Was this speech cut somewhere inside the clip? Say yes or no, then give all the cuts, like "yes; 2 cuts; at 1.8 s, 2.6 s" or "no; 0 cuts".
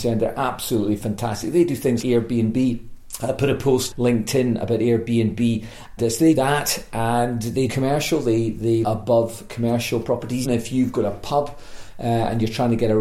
yes; 7 cuts; at 2.0 s, 3.9 s, 6.0 s, 6.4 s, 7.7 s, 8.8 s, 10.4 s